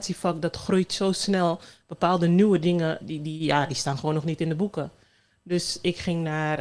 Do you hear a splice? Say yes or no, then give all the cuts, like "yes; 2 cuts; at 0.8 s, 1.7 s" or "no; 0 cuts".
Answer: yes; 1 cut; at 3.0 s